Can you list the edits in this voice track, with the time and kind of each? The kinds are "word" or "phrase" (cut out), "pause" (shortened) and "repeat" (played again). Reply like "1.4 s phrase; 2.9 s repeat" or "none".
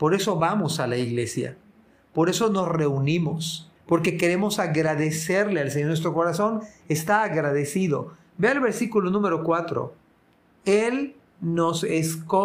3.8 s pause